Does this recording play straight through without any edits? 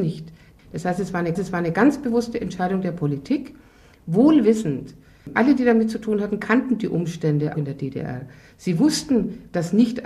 no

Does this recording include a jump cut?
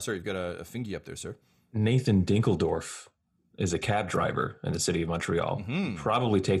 no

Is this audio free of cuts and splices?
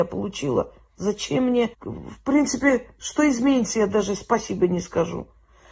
no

